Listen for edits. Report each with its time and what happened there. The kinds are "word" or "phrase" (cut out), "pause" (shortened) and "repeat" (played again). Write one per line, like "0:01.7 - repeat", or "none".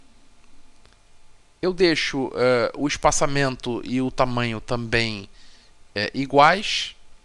none